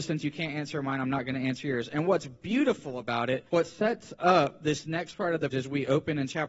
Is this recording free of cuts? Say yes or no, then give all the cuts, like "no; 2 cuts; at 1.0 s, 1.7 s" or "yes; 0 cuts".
no; 2 cuts; at 3.5 s, 5.5 s